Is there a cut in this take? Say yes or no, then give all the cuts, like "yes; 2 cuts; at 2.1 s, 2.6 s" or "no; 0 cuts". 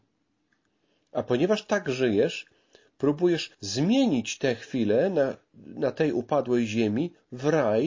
yes; 1 cut; at 3.5 s